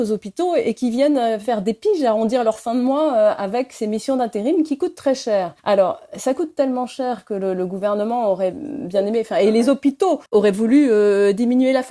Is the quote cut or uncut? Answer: cut